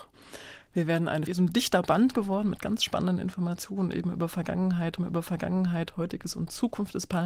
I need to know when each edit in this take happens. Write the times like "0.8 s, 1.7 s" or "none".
1.3 s, 5.0 s